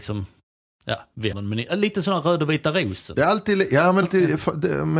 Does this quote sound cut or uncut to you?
cut